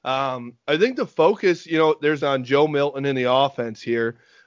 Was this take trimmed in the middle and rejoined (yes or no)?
yes